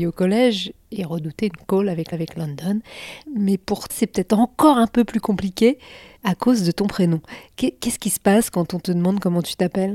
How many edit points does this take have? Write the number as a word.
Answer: four